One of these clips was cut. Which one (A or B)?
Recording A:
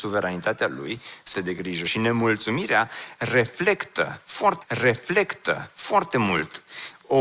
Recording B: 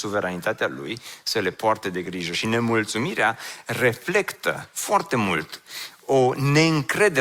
A